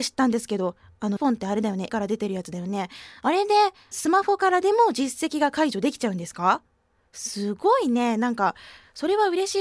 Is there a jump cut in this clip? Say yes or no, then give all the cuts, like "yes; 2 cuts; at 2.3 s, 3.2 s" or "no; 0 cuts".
yes; 3 cuts; at 1.2 s, 1.9 s, 3.9 s